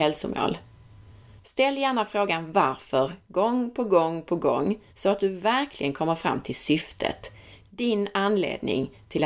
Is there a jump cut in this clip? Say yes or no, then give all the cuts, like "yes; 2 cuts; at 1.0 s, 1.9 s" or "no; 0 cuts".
yes; 1 cut; at 4.9 s